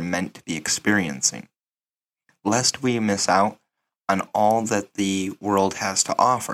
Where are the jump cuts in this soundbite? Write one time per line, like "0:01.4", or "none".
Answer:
none